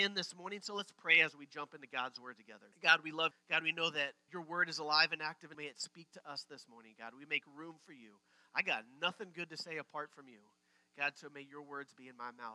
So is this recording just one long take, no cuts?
no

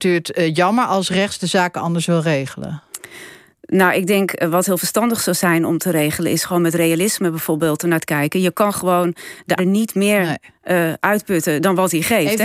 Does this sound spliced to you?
yes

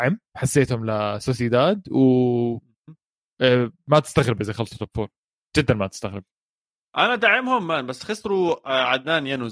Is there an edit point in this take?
no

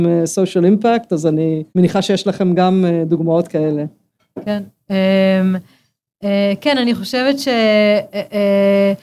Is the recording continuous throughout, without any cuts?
no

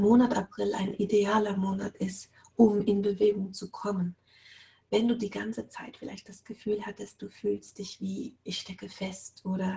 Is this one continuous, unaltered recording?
yes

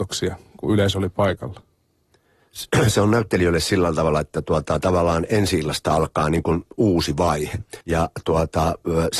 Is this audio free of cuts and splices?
no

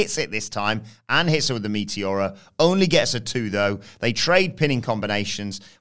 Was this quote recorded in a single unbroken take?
yes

